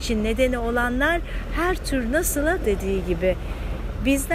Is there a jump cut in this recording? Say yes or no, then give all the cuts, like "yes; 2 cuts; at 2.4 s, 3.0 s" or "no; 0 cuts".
yes; 1 cut; at 2.6 s